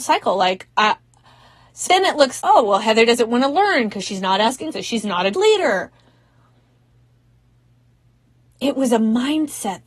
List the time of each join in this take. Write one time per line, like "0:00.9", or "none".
0:01.9
0:02.4
0:04.7
0:05.3

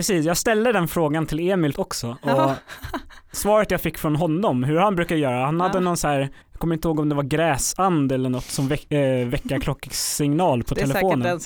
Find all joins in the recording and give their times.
0:01.7
0:06.4

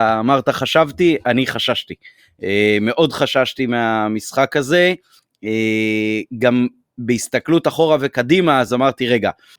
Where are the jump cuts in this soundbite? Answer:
none

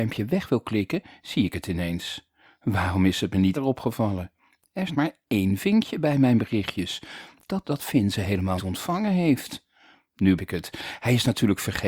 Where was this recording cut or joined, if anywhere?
0:03.5
0:04.9
0:07.6
0:08.6
0:10.4

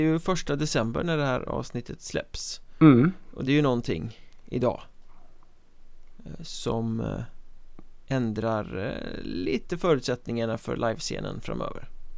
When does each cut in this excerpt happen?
0:03.5

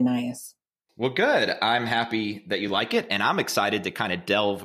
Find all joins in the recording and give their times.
none

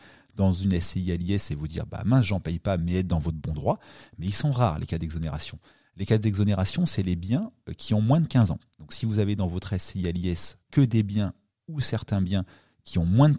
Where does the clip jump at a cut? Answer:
0:10.6

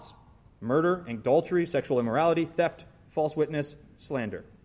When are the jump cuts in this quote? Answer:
none

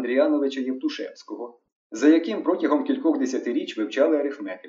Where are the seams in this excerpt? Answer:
none

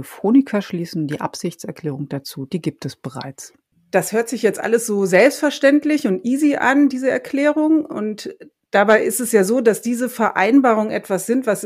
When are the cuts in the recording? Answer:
none

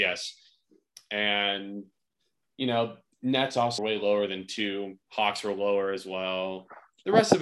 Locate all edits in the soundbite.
0:03.8
0:05.0

